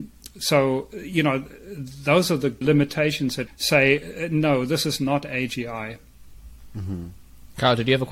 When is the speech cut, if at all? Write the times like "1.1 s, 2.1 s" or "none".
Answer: 2.6 s, 3.5 s